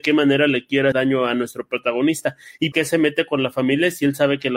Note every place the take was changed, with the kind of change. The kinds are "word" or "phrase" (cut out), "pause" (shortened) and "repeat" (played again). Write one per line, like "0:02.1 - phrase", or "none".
0:00.9 - word
0:02.7 - word

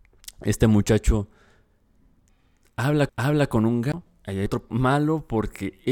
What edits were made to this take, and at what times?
0:03.1 - repeat
0:04.1 - pause
0:04.7 - word

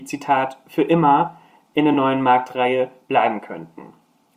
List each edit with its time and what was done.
none

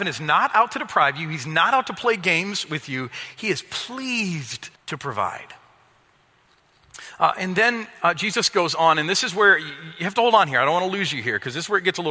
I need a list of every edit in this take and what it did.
0:04.8 - pause

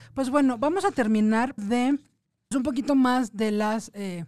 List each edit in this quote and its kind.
0:01.6 - word
0:02.5 - word

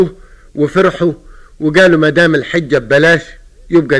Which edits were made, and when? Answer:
none

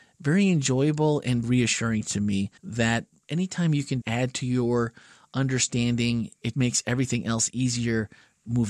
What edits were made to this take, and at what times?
0:01.4 - word
0:02.6 - pause
0:04.0 - word
0:06.5 - word

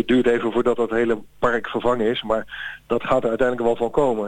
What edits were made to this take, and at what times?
none

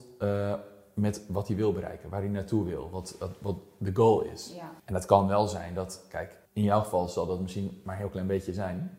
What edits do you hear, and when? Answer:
0:04.8 - pause
0:06.5 - pause

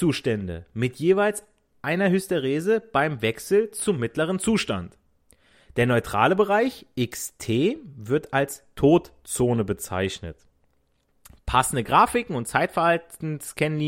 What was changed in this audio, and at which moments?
none

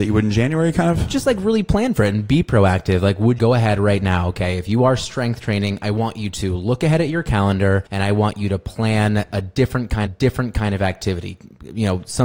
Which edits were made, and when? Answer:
0:03.4 - phrase
0:07.9 - pause
0:10.1 - repeat

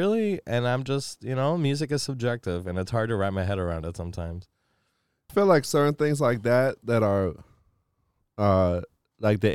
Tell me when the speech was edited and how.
0:05.3 - word

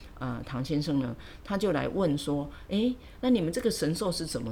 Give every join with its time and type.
none

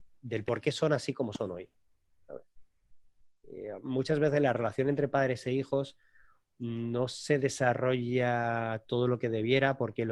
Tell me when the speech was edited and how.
none

